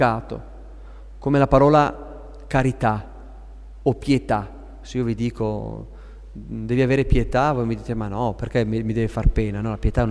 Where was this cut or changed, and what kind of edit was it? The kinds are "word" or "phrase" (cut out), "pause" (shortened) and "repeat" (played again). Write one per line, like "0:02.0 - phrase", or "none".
none